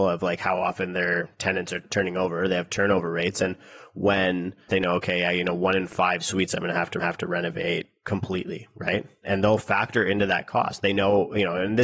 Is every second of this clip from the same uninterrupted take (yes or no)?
no